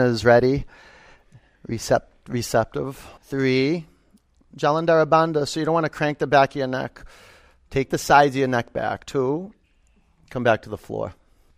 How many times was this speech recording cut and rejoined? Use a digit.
1